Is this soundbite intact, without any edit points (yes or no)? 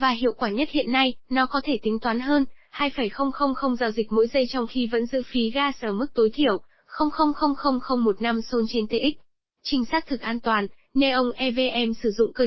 no